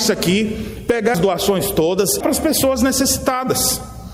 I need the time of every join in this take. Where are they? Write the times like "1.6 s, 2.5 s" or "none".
1.1 s, 2.2 s